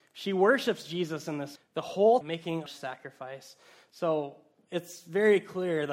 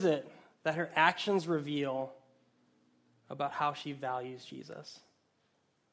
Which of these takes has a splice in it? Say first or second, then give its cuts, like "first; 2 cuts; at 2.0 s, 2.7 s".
first; 3 cuts; at 1.6 s, 2.2 s, 2.7 s